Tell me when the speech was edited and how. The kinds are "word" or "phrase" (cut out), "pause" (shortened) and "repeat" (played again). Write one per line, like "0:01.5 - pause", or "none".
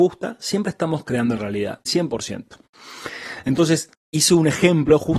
0:01.4 - word
0:01.9 - word
0:03.9 - pause